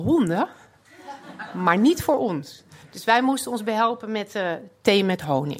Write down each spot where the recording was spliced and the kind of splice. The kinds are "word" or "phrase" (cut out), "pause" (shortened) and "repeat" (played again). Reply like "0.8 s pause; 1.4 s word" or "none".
2.8 s pause